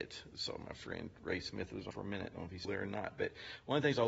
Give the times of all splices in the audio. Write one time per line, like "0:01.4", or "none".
0:01.9
0:02.6